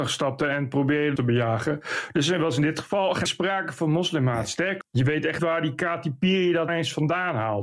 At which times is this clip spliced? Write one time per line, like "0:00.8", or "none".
0:01.2
0:03.3
0:04.8
0:05.4
0:06.7